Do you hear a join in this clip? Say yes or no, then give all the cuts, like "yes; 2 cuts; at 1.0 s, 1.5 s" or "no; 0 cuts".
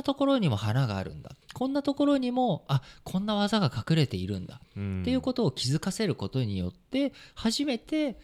yes; 1 cut; at 1.4 s